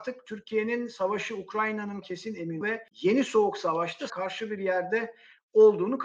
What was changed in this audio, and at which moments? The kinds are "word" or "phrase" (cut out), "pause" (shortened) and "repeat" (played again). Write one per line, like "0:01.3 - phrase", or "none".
0:02.0 - word
0:02.6 - word
0:02.9 - pause
0:04.1 - phrase